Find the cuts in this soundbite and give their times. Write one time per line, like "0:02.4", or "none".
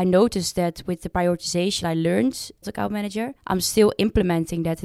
0:01.8
0:02.6
0:03.4